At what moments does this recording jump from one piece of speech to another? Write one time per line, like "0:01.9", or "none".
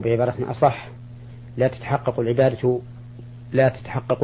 none